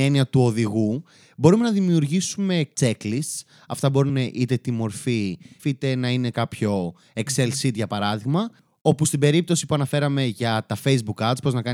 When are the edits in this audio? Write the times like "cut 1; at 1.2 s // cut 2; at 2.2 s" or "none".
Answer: cut 1; at 2.7 s // cut 2; at 4.1 s // cut 3; at 5.6 s // cut 4; at 6.3 s